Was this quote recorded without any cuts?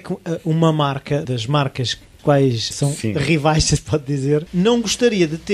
no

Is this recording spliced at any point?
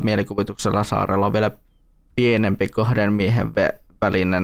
no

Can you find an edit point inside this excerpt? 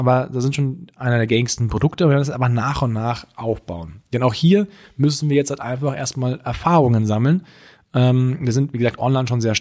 no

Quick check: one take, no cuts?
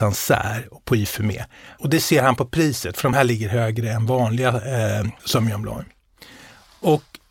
yes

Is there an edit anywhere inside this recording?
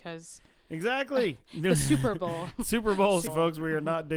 yes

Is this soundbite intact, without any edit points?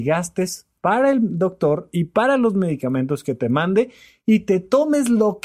yes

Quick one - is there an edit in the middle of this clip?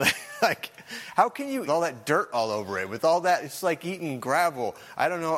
yes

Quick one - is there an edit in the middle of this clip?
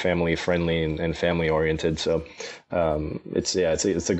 no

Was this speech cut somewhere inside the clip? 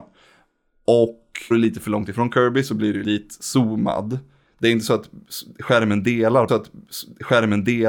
yes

